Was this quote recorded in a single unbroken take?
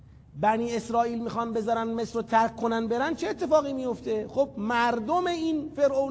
yes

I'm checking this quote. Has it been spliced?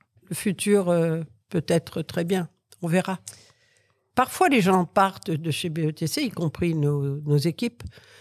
no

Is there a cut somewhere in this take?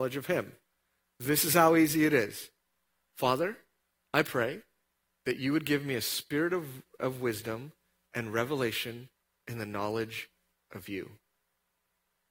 no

